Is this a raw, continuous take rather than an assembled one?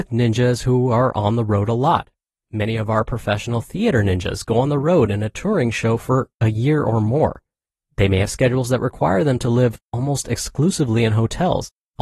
yes; 0 cuts

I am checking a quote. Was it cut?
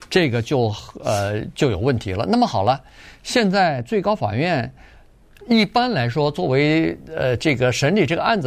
no; 0 cuts

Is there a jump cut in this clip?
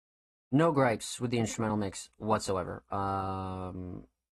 no; 0 cuts

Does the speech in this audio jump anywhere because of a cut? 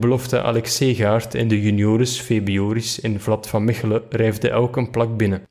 no; 0 cuts

